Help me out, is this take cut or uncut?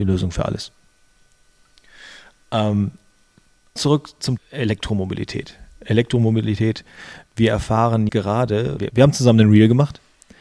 cut